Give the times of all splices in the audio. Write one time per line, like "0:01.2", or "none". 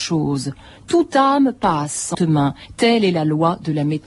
0:02.1